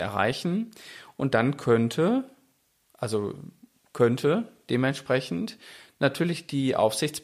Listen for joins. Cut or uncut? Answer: uncut